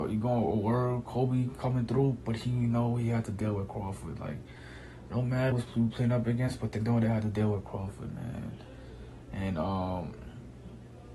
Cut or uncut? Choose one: cut